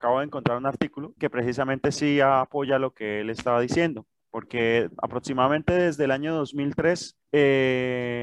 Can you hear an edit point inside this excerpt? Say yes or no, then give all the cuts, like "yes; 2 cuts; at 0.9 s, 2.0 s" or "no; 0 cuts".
yes; 2 cuts; at 1.2 s, 7.2 s